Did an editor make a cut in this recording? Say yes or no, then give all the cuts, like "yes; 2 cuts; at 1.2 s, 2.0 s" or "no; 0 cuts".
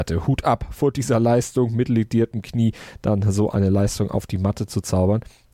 no; 0 cuts